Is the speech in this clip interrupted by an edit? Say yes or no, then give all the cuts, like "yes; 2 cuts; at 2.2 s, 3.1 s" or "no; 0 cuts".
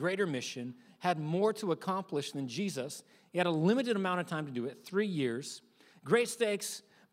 no; 0 cuts